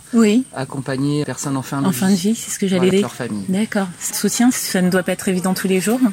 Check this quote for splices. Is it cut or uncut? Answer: cut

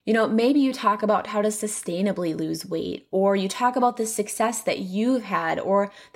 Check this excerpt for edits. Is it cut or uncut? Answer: uncut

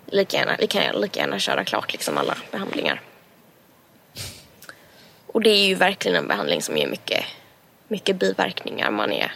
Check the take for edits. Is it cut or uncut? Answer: uncut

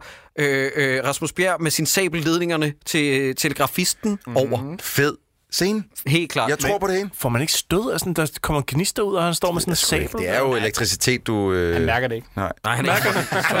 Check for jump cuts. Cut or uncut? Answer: uncut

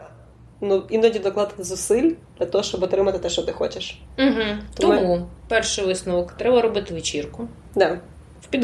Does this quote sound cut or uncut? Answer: uncut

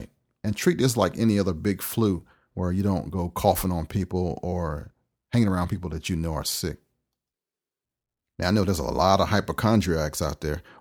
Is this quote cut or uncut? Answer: uncut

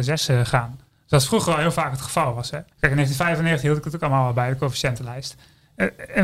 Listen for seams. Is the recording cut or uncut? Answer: cut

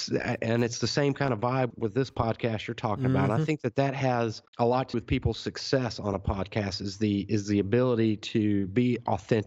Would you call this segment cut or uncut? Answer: cut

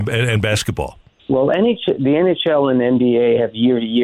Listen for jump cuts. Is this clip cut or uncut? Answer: cut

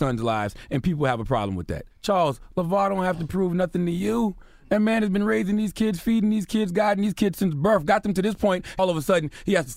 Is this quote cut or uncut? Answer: cut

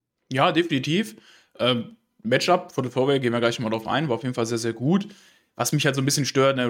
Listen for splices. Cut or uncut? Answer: uncut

